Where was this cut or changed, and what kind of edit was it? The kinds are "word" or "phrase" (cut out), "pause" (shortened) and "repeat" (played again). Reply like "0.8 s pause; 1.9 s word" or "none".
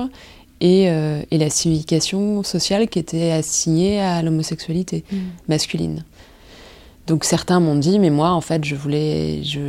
none